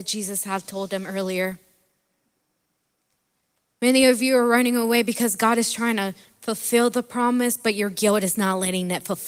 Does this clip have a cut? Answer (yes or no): no